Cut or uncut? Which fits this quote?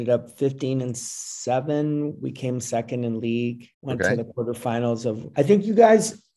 cut